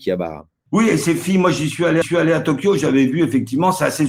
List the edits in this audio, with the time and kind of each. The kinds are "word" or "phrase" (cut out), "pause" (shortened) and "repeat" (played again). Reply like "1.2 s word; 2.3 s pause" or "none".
2.0 s repeat